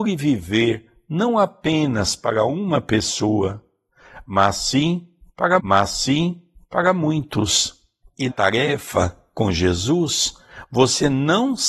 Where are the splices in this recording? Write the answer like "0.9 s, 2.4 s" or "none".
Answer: 5.6 s, 8.3 s